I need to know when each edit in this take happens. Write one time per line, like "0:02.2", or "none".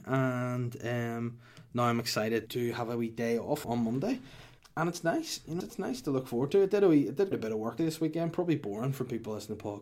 0:02.5
0:03.6
0:04.6
0:05.6
0:07.3
0:07.8